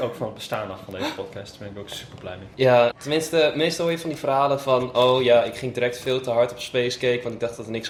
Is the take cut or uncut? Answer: cut